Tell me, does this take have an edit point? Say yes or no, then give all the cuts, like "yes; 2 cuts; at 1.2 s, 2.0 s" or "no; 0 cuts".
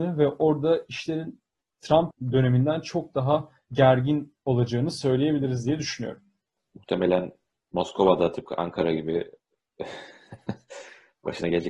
no; 0 cuts